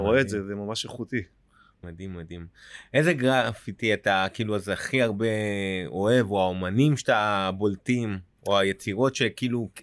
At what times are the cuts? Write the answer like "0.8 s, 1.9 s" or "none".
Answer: 1.8 s